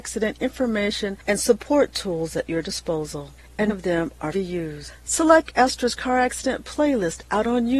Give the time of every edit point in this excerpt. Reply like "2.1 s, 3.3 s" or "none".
3.7 s, 4.3 s